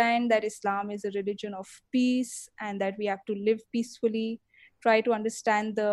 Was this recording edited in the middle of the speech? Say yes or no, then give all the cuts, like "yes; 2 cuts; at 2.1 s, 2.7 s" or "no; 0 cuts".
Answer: no; 0 cuts